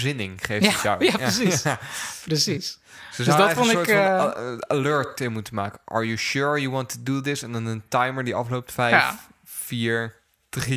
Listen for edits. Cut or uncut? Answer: uncut